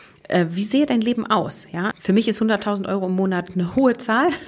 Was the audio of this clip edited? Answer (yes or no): yes